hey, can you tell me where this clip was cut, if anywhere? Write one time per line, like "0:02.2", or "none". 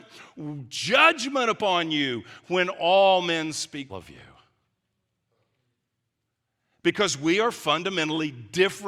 0:03.9

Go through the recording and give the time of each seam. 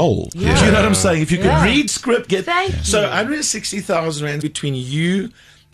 0:01.9
0:02.3
0:04.4

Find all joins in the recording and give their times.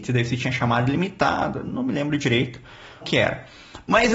0:03.0

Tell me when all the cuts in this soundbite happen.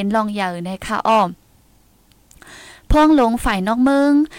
none

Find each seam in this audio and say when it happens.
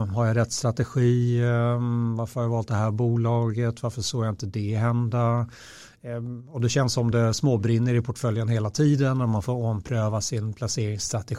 none

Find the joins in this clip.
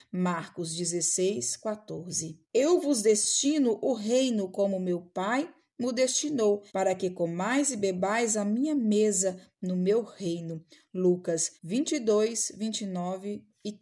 0:02.4
0:06.7
0:11.6

